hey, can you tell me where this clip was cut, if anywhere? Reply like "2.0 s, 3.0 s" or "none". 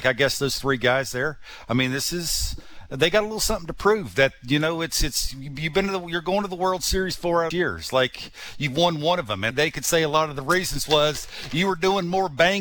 7.5 s, 9.5 s

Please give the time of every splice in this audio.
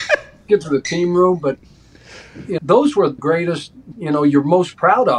2.6 s, 3.2 s, 3.9 s

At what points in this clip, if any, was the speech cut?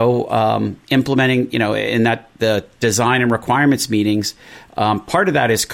2.4 s

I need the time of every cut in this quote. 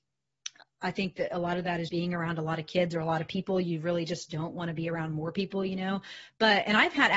1.9 s

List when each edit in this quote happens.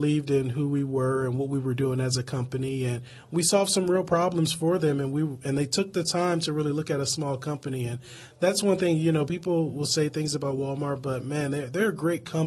none

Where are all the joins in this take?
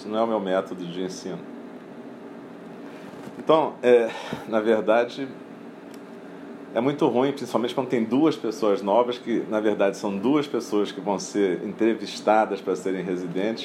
none

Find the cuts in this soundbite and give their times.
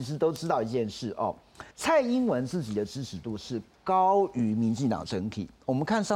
1.7 s

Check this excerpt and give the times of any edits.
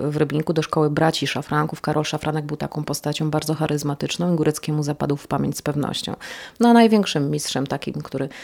none

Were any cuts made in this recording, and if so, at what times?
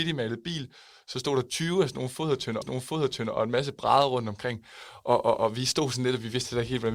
2.6 s

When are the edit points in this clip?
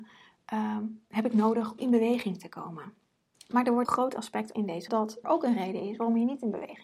1.0 s, 1.8 s, 3.3 s, 3.8 s, 4.5 s, 4.9 s, 5.2 s

